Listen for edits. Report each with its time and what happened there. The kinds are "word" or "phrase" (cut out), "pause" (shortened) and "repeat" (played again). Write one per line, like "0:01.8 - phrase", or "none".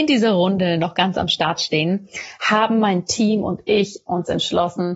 none